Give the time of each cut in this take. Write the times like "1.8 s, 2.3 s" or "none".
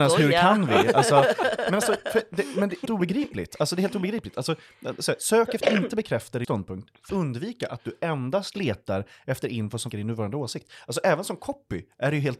1.6 s, 2.9 s, 5.6 s, 6.4 s, 7.1 s, 9.9 s